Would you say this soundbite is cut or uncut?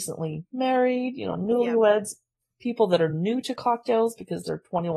uncut